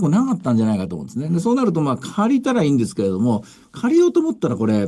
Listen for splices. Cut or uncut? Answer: uncut